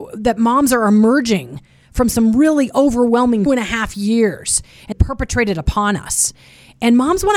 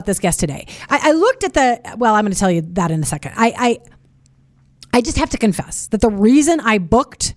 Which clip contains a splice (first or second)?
first